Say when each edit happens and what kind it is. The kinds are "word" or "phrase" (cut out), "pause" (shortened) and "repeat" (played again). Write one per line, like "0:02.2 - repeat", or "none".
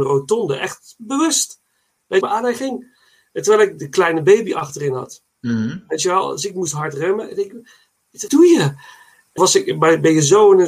0:02.2 - phrase
0:05.3 - pause
0:08.3 - word
0:09.4 - word